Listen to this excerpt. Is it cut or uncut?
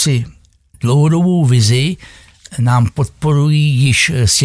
uncut